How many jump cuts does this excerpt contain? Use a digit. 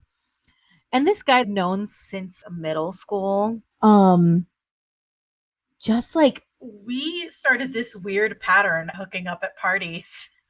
5